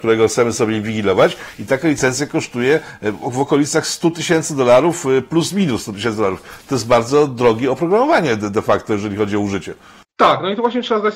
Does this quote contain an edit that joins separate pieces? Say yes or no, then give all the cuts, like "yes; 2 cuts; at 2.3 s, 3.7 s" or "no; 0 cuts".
no; 0 cuts